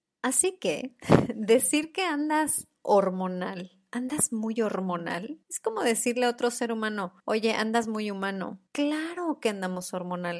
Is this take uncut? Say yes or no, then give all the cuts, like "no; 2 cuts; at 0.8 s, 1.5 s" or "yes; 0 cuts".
no; 3 cuts; at 5.4 s, 7.2 s, 8.7 s